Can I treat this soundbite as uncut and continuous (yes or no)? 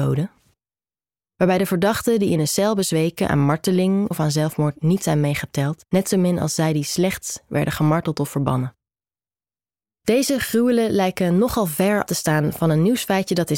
no